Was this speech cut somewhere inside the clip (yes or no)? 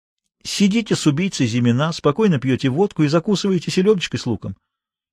no